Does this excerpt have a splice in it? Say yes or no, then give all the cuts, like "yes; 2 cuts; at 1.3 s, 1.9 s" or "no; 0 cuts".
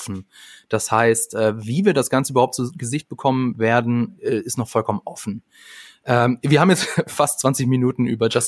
no; 0 cuts